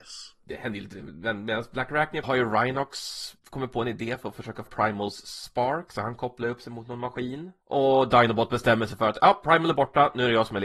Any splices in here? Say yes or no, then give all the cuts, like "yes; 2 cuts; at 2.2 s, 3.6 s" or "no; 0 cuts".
yes; 4 cuts; at 2.2 s, 3.4 s, 4.7 s, 7.6 s